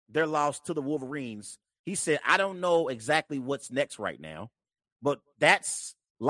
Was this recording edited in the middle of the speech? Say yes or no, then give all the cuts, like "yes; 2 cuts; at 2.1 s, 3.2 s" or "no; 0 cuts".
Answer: no; 0 cuts